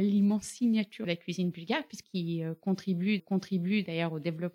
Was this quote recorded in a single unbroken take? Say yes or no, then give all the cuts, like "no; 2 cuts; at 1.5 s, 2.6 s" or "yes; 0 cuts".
no; 3 cuts; at 1.0 s, 2.0 s, 3.2 s